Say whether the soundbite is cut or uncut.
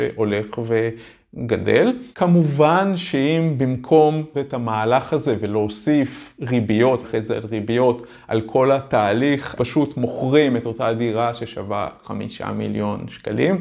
cut